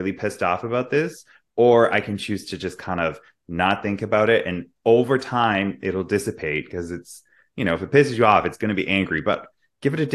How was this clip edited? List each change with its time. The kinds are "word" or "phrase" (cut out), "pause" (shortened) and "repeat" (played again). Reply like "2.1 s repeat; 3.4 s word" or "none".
none

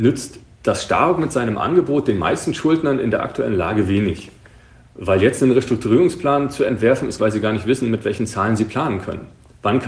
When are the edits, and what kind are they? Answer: 7.2 s phrase

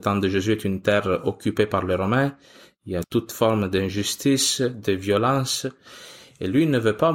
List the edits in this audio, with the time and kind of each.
3.0 s word

